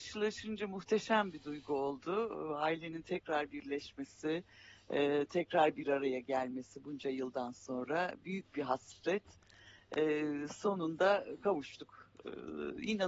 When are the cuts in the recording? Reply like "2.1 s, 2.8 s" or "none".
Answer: none

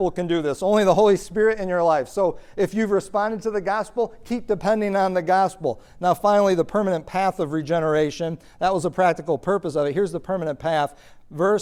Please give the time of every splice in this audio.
none

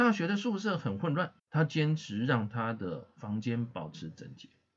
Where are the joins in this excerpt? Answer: 1.4 s

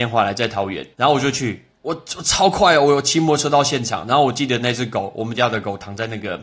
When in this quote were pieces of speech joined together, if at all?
0.9 s

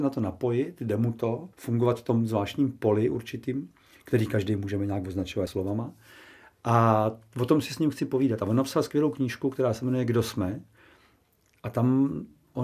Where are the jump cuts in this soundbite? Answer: 1.5 s, 5.5 s

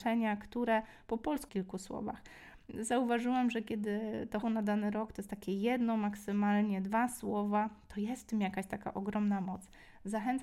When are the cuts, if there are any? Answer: 1.5 s, 4.4 s

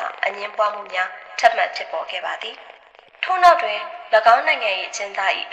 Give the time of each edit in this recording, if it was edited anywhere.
2.8 s

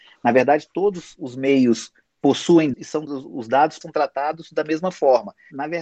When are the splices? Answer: 2.7 s, 3.1 s, 3.8 s

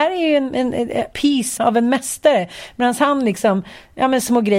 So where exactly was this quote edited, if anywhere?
1.1 s, 1.6 s

